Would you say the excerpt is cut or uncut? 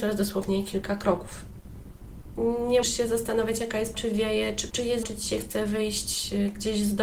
cut